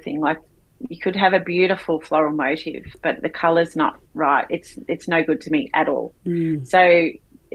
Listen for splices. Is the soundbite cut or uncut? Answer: cut